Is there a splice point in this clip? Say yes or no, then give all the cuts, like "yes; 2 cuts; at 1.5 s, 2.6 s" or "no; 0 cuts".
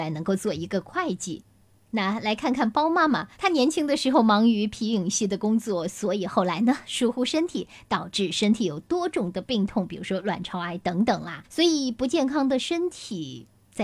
yes; 2 cuts; at 3.3 s, 11.4 s